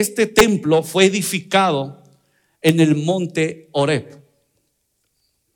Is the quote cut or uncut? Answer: uncut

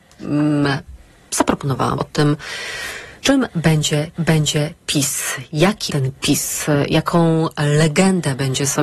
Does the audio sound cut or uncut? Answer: cut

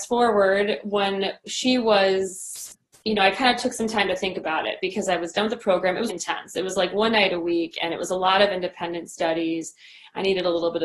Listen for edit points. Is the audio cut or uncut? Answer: cut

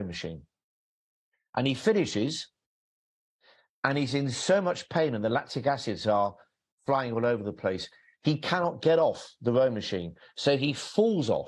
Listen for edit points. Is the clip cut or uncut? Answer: uncut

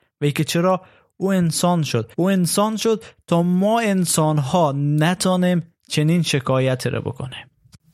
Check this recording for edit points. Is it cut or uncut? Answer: cut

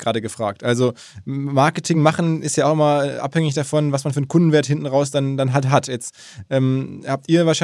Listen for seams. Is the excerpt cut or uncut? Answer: uncut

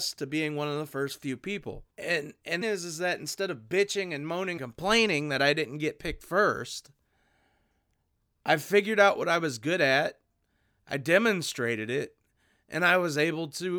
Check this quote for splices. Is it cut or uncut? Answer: cut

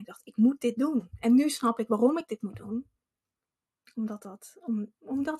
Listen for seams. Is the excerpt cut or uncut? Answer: uncut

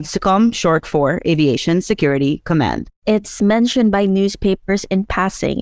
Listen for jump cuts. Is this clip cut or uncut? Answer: cut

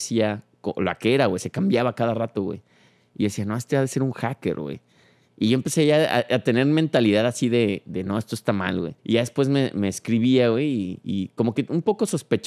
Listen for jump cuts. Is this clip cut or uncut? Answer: cut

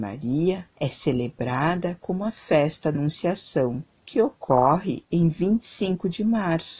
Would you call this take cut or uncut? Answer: cut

